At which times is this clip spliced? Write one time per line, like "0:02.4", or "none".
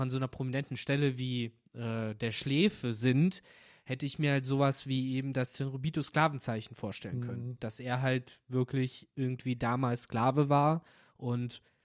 0:01.7